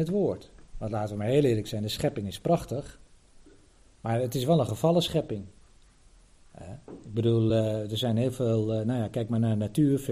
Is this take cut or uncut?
uncut